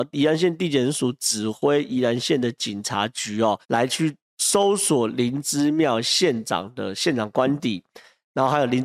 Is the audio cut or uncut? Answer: cut